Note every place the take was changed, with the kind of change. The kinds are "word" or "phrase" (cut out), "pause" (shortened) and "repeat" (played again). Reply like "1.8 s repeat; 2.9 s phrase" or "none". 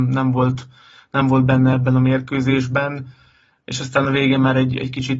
none